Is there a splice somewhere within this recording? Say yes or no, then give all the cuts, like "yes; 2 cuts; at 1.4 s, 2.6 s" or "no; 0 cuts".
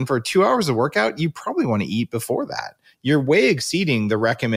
no; 0 cuts